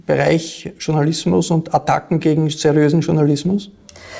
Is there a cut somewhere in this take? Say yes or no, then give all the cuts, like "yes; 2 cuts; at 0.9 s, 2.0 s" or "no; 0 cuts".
no; 0 cuts